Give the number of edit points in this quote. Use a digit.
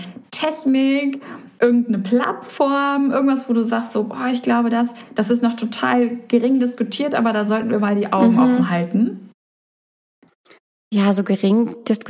0